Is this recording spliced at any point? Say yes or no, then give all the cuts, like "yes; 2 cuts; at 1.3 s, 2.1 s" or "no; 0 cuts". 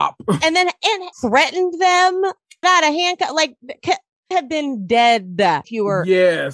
yes; 4 cuts; at 1.1 s, 2.6 s, 4.3 s, 5.6 s